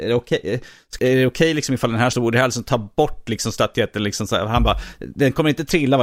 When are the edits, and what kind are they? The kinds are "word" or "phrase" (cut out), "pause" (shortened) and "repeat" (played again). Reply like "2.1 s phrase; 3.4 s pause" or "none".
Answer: 1.0 s word; 2.1 s word